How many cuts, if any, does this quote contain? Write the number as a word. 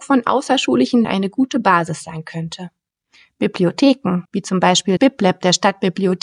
three